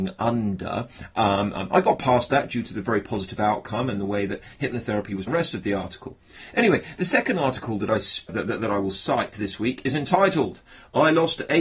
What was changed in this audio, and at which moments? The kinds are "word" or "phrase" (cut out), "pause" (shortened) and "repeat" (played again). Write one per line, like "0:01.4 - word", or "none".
0:05.3 - phrase
0:08.3 - word